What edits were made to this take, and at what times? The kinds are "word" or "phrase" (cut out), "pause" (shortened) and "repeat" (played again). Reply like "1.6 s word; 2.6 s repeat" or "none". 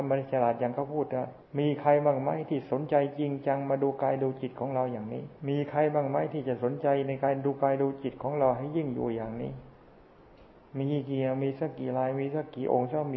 1.4 s pause; 5.4 s pause